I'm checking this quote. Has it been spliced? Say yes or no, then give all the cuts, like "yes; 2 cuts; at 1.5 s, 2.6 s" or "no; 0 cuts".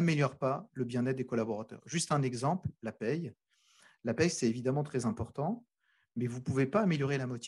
no; 0 cuts